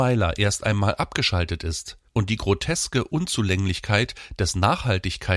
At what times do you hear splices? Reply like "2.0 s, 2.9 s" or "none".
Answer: 2.1 s